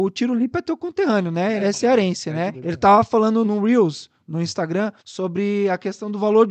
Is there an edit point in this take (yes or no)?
yes